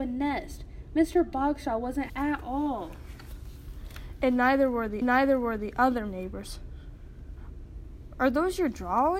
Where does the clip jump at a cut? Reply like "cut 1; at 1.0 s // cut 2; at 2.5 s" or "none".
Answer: cut 1; at 2.1 s // cut 2; at 5.0 s